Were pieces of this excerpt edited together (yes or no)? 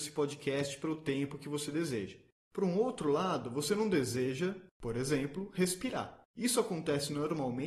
no